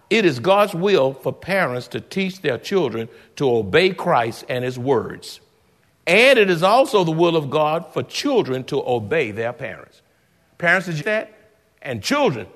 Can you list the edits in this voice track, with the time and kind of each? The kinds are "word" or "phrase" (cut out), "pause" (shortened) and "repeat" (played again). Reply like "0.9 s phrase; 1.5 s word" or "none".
11.0 s phrase